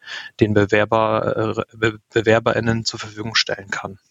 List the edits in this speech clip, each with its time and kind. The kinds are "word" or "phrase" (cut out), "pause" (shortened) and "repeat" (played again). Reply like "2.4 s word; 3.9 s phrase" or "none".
none